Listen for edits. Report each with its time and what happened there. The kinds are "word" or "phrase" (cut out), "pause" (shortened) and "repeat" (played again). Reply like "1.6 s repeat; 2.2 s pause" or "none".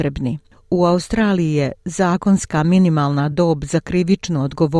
none

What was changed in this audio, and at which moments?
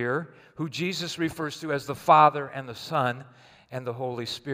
none

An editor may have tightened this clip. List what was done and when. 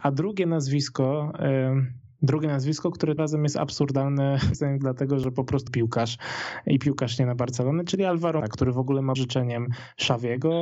3.2 s word; 4.5 s word; 5.7 s phrase; 8.4 s word; 9.2 s phrase

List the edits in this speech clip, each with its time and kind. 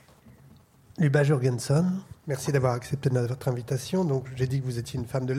2.2 s pause

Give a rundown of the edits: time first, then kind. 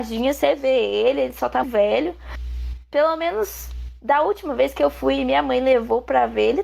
1.6 s word

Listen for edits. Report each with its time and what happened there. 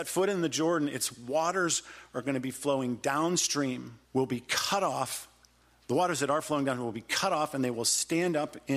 4.0 s pause

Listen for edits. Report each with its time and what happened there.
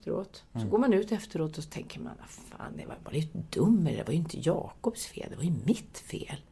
3.0 s word

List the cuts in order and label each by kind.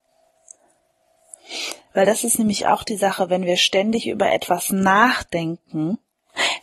none

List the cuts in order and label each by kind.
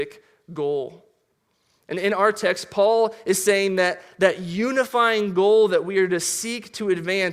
none

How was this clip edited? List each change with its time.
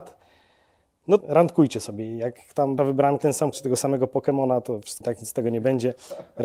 1.2 s word; 2.8 s word; 3.2 s word; 3.5 s word; 5.0 s word

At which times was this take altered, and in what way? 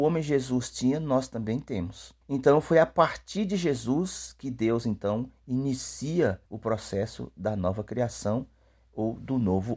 2.2 s pause; 6.5 s pause

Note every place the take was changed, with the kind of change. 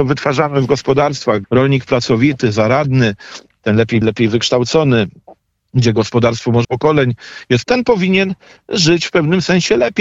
1.4 s word; 4.0 s word; 6.6 s word; 7.6 s word

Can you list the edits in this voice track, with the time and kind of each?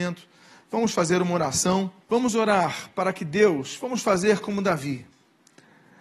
2.0 s pause

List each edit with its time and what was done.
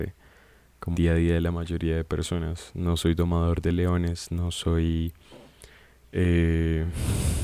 0.9 s word

